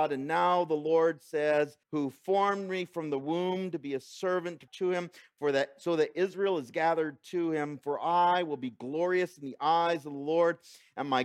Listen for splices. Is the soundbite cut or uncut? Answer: cut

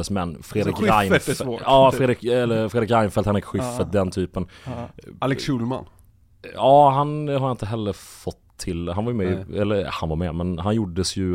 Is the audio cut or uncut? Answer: uncut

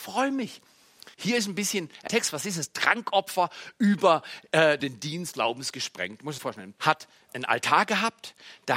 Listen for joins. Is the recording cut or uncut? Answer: cut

